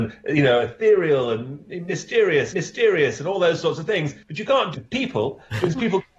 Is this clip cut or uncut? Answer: cut